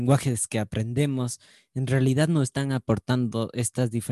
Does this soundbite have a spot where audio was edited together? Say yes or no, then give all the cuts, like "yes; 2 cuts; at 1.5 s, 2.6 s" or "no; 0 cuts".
no; 0 cuts